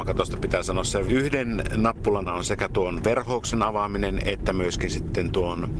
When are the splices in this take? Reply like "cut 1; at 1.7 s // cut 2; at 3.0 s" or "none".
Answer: cut 1; at 1.1 s // cut 2; at 2.3 s